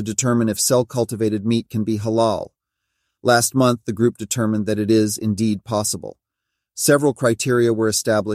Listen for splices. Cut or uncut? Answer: uncut